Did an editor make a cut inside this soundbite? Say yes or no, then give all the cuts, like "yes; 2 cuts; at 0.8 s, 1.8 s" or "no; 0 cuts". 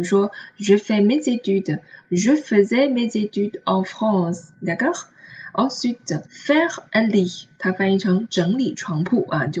yes; 2 cuts; at 4.5 s, 6.3 s